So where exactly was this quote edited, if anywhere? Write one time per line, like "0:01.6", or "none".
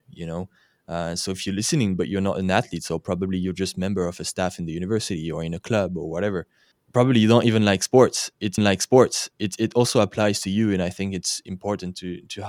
0:06.7
0:08.6